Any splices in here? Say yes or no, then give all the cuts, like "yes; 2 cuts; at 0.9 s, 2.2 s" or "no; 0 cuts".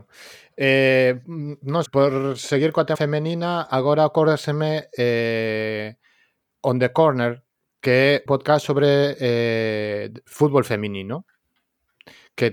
yes; 4 cuts; at 1.9 s, 2.9 s, 8.3 s, 10.3 s